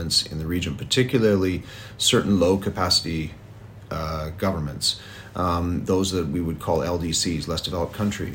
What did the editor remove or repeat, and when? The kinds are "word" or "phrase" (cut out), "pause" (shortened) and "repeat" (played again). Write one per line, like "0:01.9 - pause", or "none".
none